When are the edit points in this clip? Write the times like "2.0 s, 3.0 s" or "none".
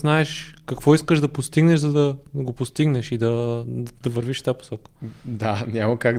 none